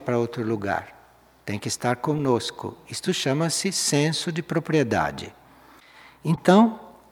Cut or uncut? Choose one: uncut